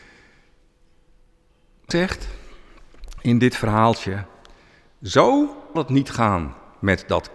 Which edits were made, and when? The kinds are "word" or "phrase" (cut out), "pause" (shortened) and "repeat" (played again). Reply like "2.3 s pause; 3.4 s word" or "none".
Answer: 1.9 s word; 5.8 s word